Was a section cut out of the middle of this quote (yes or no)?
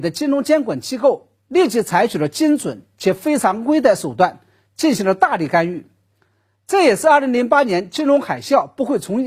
no